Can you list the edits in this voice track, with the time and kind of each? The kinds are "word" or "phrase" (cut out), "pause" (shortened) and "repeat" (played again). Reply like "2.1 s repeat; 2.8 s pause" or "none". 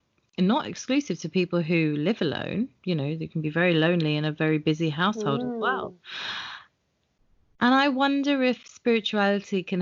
none